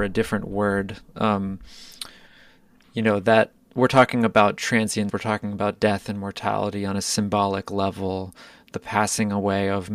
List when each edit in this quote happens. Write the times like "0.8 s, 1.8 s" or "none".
5.1 s